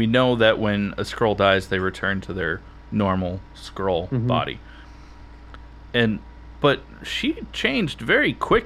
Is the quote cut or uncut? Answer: uncut